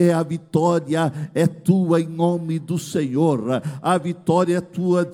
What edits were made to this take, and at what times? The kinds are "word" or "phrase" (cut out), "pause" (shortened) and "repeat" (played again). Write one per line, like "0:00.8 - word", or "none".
none